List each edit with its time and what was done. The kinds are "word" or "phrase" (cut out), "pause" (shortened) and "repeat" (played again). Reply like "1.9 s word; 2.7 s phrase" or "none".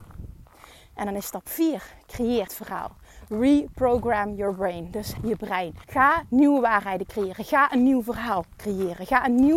2.5 s word; 5.2 s word; 5.8 s pause